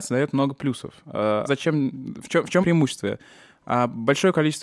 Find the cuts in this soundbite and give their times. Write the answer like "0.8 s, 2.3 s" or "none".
1.5 s, 2.6 s

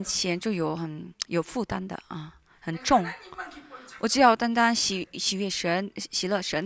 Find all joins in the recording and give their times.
none

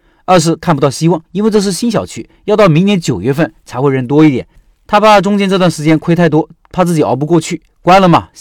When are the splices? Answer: 1.3 s

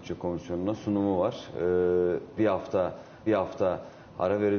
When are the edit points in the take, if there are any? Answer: 2.4 s, 3.3 s

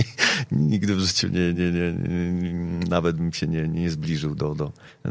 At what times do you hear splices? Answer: none

